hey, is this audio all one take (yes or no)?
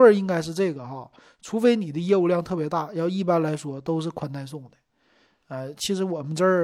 yes